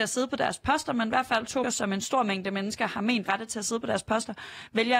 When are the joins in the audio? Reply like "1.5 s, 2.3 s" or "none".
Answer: 1.6 s, 3.3 s